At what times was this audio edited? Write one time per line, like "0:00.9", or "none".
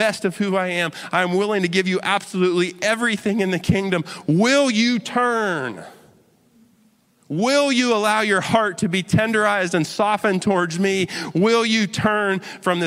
none